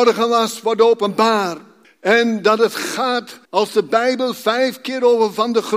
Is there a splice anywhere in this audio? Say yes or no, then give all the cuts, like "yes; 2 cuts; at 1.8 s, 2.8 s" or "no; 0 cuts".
yes; 2 cuts; at 1.8 s, 3.4 s